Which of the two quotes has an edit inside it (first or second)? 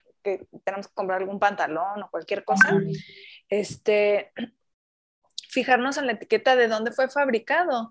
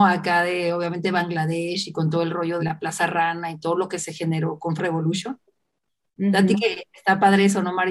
second